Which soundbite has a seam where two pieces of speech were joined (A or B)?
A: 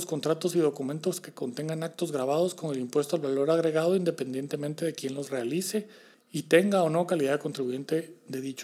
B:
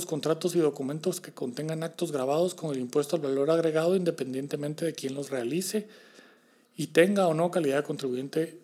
A